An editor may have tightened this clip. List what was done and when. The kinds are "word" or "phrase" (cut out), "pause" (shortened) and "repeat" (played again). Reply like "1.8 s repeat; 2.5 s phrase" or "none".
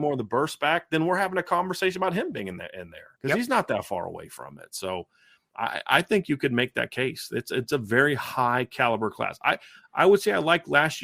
3.2 s pause